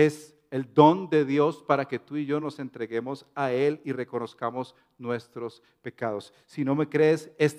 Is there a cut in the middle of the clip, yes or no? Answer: no